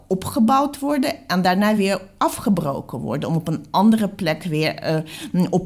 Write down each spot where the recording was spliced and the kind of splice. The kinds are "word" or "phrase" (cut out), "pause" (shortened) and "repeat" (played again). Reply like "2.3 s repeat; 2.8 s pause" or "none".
none